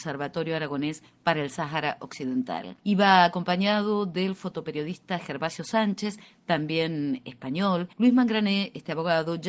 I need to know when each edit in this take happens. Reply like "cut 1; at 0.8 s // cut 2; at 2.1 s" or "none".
cut 1; at 2.8 s // cut 2; at 7.9 s